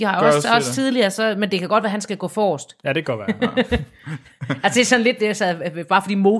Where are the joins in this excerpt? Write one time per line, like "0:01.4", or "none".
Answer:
none